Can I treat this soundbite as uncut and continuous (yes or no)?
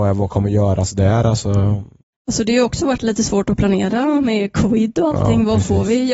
no